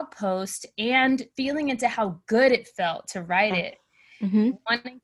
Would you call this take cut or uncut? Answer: cut